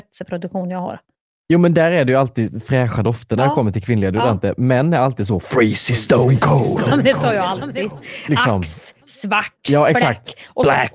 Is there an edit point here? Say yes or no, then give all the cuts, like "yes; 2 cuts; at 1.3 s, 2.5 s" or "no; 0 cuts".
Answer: no; 0 cuts